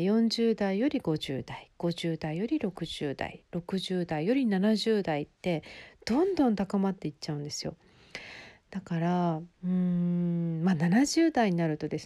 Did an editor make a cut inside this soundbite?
yes; 1 cut; at 9.5 s

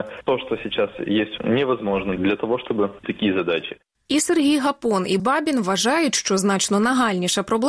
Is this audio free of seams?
no; 4 cuts; at 1.4 s, 2.2 s, 3.0 s, 5.2 s

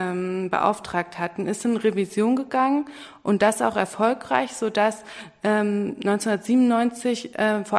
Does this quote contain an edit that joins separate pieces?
no; 0 cuts

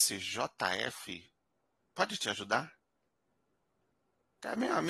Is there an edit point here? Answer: no; 0 cuts

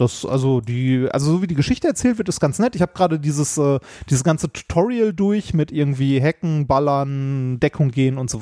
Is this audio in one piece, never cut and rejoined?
yes; 0 cuts

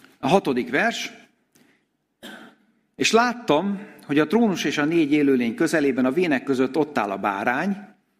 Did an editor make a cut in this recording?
no; 0 cuts

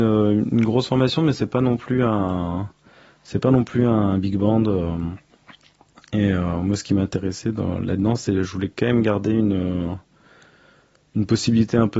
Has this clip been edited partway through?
no; 0 cuts

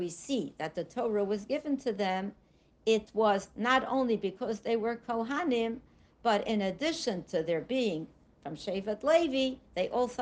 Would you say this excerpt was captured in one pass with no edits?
yes; 0 cuts

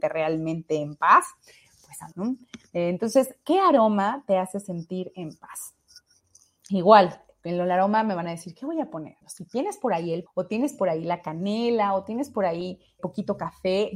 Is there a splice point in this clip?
yes; 4 cuts; at 2.1 s, 9.2 s, 10.3 s, 13.0 s

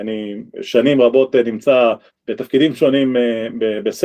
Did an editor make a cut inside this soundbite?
yes; 1 cut; at 2.1 s

